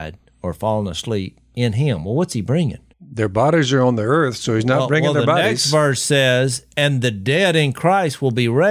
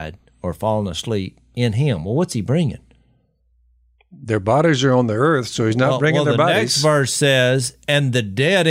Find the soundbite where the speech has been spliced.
first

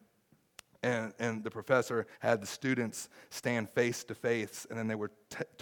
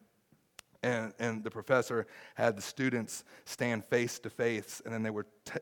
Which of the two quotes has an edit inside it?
first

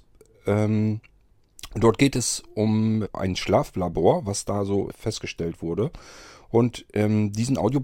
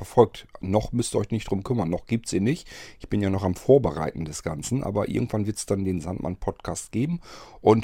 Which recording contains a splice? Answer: first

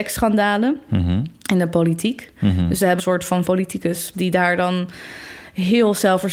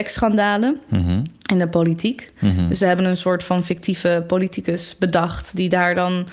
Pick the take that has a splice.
first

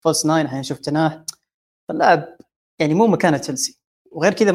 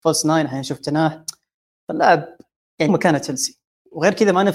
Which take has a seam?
second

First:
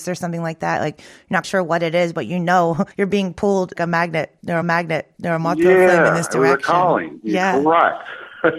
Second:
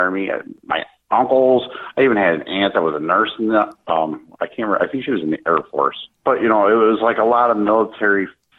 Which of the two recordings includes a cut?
first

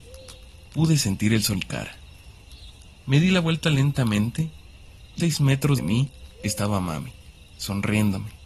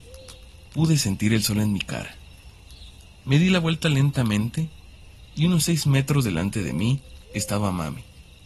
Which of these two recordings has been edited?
first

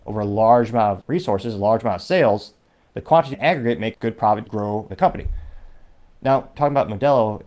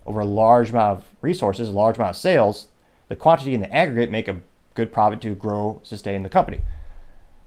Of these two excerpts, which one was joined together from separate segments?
first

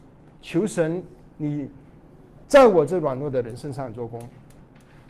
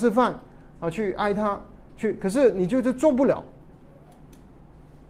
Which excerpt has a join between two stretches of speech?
first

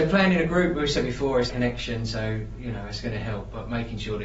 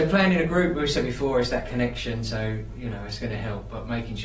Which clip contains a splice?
first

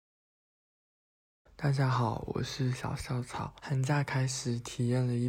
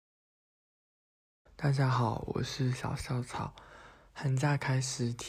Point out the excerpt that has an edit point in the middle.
first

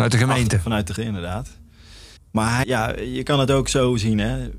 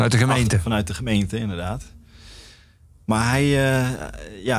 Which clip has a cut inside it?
first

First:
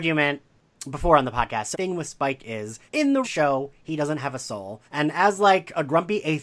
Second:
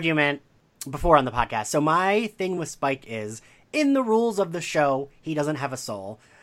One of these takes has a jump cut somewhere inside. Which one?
first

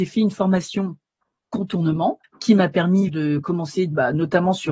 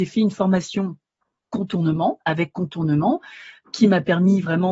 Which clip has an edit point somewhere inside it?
first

